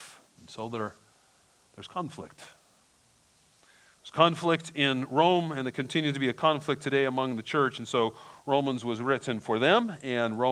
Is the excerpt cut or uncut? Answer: uncut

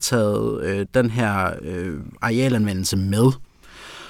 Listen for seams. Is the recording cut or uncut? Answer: uncut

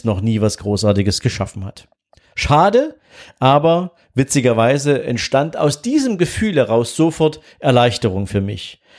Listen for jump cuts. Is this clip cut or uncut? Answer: uncut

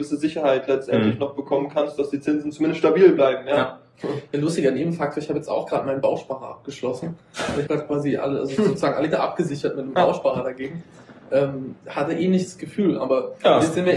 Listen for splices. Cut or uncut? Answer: cut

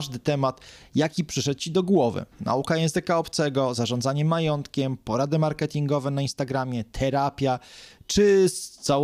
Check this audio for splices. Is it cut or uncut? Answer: uncut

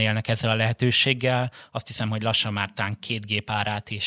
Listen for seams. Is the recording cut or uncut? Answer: uncut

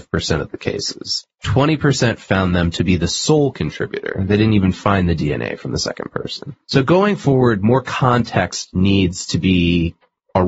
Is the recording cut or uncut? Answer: cut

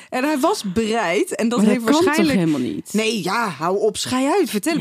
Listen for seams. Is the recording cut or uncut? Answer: uncut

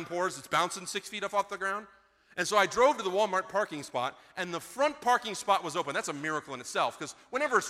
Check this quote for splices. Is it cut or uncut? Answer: uncut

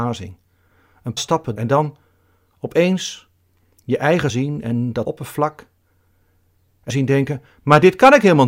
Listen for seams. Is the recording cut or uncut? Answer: cut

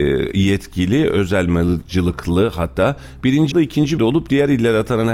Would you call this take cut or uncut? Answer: cut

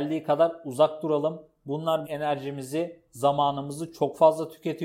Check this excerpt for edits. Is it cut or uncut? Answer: cut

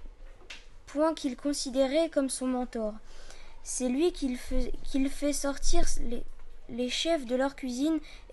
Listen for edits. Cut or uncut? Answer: uncut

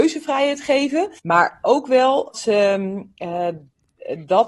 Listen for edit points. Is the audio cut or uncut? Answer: cut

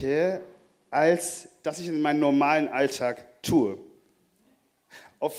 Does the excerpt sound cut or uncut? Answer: uncut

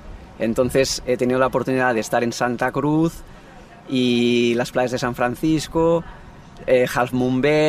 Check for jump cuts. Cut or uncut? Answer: uncut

